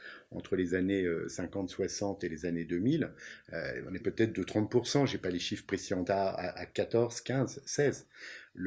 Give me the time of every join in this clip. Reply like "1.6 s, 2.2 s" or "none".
4.0 s, 6.1 s